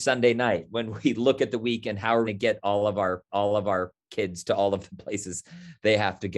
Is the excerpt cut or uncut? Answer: cut